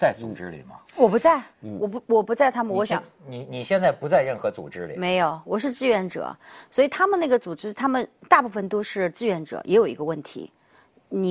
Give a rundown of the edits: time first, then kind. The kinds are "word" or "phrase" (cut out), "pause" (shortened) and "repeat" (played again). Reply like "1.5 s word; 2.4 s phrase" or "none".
1.5 s pause